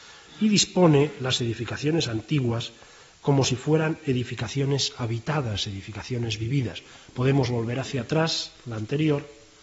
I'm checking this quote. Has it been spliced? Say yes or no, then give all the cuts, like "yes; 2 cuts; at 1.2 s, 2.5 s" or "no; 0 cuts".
no; 0 cuts